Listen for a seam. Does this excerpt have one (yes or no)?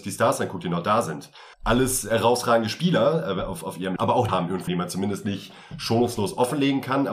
yes